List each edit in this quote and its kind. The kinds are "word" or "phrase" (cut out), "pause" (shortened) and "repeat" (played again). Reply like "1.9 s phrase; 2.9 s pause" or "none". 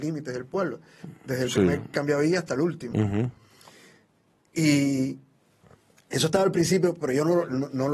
none